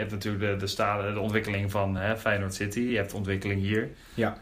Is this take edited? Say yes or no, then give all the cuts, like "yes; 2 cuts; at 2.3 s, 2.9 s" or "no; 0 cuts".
no; 0 cuts